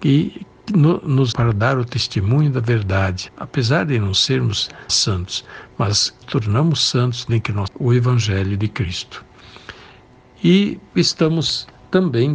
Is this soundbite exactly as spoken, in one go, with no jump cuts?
no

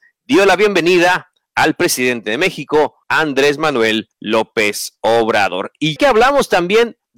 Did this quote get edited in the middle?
yes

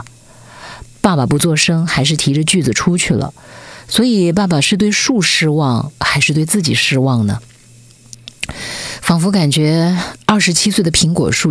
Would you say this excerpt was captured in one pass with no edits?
no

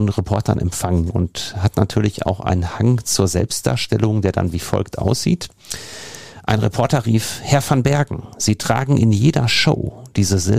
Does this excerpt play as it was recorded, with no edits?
yes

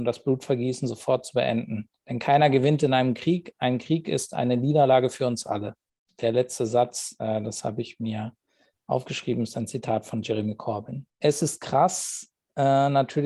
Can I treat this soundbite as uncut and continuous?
no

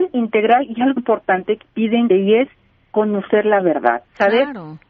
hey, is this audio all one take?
no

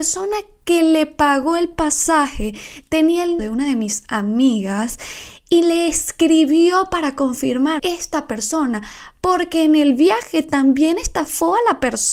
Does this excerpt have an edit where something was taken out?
yes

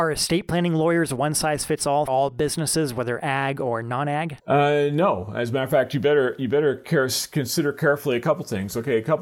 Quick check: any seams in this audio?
yes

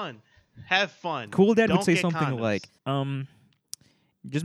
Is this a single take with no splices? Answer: no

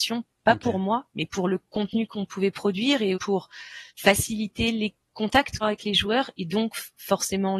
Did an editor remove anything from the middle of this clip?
yes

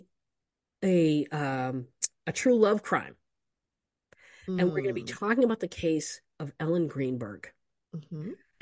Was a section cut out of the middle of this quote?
no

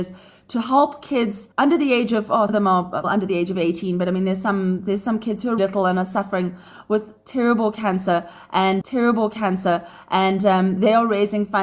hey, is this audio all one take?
no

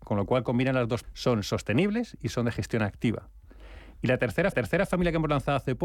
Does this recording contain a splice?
yes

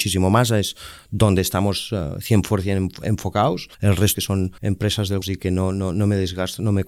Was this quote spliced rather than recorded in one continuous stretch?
yes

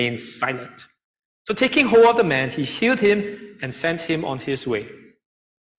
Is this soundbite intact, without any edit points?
yes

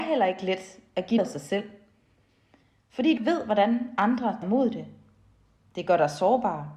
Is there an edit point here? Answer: yes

